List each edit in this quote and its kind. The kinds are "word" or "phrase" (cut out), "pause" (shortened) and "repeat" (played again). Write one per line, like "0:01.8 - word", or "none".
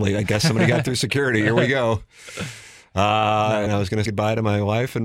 0:03.7 - word
0:04.0 - word